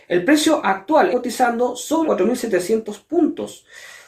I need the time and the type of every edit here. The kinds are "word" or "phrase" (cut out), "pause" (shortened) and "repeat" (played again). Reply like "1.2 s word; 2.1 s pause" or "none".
1.1 s word; 2.1 s word